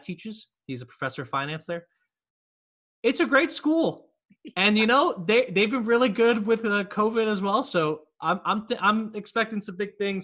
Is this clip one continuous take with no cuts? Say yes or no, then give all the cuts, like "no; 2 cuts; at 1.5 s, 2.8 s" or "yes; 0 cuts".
yes; 0 cuts